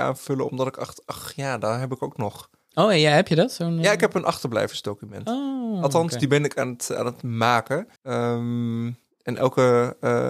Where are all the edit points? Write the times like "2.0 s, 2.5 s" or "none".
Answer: 8.0 s